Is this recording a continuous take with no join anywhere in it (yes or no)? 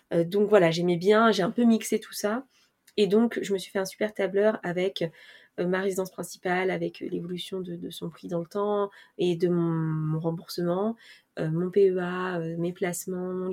yes